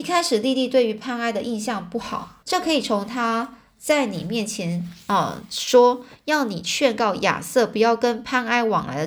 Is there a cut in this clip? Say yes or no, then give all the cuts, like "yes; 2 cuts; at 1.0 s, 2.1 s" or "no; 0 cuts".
yes; 1 cut; at 2.4 s